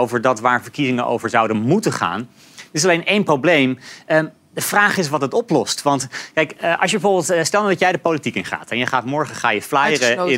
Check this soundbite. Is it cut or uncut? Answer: uncut